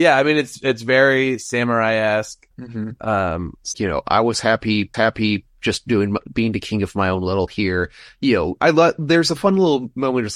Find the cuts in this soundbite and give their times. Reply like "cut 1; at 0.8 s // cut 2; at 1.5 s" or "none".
cut 1; at 2.5 s // cut 2; at 3.7 s // cut 3; at 4.9 s // cut 4; at 7.5 s